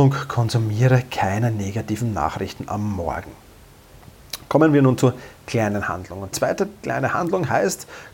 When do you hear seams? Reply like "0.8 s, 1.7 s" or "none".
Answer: 5.4 s, 6.3 s